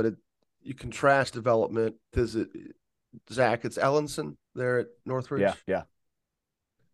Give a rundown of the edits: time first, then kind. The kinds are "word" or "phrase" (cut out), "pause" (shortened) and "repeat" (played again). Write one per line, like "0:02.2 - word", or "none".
0:01.3 - word
0:02.1 - word
0:04.4 - pause
0:05.6 - pause